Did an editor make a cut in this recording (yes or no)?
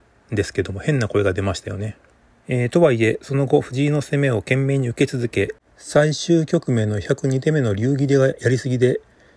yes